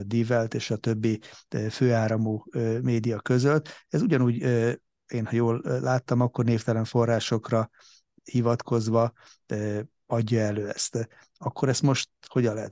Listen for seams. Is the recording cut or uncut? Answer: uncut